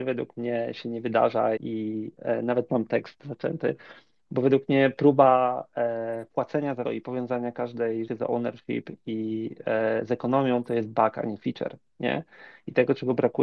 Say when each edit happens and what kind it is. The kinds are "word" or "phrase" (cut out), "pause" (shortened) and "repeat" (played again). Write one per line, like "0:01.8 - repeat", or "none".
0:01.6 - word
0:02.7 - word
0:06.8 - word
0:08.1 - word